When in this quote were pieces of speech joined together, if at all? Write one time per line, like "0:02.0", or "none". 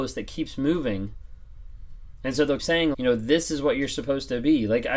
0:02.6
0:02.9